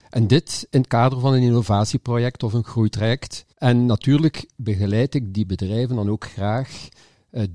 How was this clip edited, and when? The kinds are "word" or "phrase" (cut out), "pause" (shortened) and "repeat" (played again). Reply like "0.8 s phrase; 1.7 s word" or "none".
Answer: 3.5 s pause